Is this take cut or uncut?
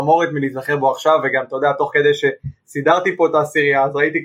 uncut